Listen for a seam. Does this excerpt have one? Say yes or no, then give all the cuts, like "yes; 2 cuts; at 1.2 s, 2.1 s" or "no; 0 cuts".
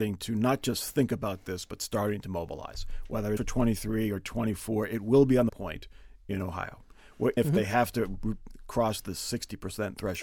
yes; 3 cuts; at 3.4 s, 5.5 s, 7.4 s